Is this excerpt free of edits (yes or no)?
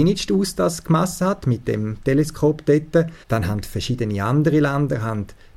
no